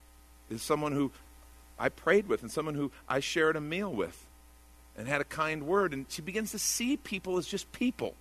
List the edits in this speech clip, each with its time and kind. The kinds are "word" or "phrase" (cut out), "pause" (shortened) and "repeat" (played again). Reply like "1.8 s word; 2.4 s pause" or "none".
none